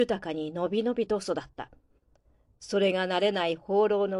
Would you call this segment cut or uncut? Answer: uncut